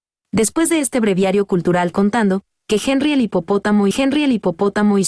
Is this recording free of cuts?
no; 2 cuts; at 1.9 s, 3.9 s

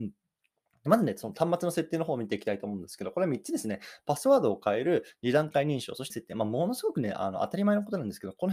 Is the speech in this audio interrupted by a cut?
yes; 1 cut; at 6.1 s

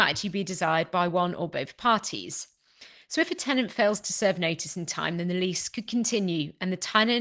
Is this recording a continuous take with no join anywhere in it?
yes; 0 cuts

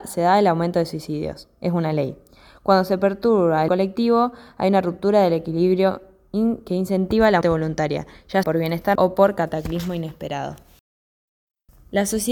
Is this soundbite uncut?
no; 4 cuts; at 3.7 s, 7.4 s, 8.4 s, 9.0 s

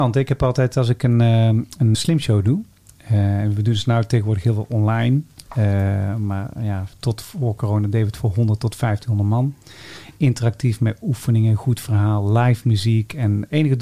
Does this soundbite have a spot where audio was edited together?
yes; 1 cut; at 1.9 s

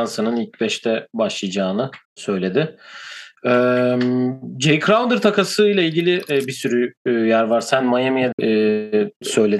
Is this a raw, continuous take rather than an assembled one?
no; 2 cuts; at 2.0 s, 8.3 s

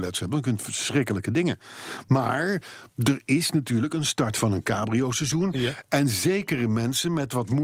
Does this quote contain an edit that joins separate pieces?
no; 0 cuts

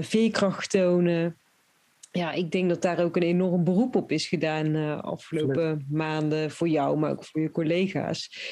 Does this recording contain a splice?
no; 0 cuts

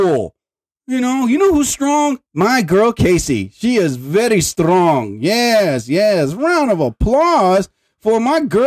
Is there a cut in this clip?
yes; 1 cut; at 2.3 s

